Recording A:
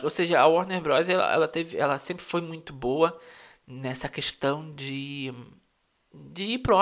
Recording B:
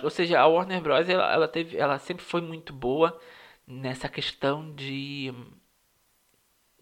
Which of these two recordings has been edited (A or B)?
A